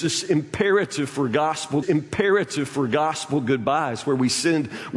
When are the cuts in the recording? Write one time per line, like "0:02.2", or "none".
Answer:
0:01.8